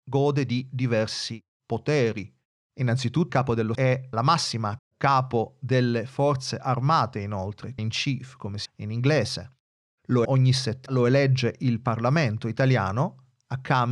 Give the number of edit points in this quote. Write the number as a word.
eight